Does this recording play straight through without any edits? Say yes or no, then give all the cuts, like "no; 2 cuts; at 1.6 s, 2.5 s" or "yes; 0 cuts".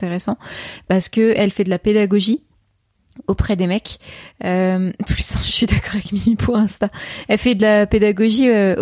yes; 0 cuts